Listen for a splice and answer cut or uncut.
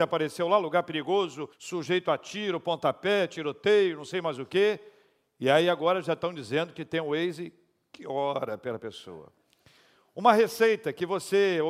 cut